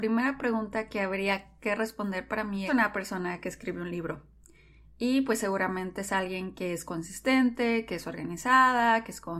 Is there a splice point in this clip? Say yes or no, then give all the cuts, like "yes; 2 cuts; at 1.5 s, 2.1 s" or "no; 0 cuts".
yes; 1 cut; at 2.7 s